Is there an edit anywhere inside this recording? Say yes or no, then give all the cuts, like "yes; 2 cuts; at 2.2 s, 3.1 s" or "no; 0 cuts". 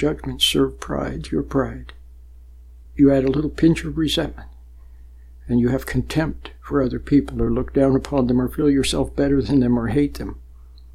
no; 0 cuts